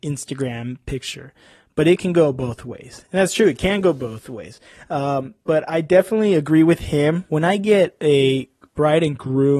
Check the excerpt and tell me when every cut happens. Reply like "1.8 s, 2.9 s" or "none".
none